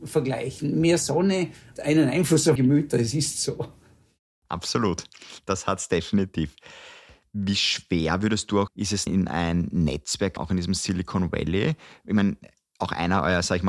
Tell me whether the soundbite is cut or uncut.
cut